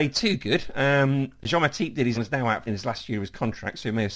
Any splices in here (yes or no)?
yes